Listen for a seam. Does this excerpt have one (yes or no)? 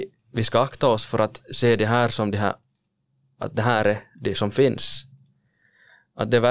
no